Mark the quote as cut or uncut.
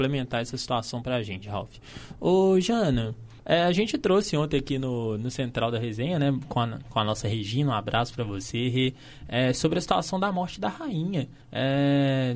cut